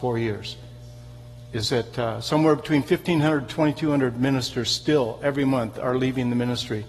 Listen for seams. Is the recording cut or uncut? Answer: uncut